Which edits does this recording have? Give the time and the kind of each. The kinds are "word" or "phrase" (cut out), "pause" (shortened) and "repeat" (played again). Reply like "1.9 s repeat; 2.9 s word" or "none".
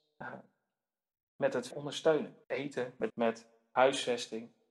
1.7 s word; 2.4 s pause; 3.1 s word